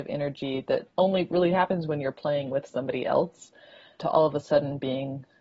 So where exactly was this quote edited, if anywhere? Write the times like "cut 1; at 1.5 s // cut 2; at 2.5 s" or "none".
cut 1; at 0.9 s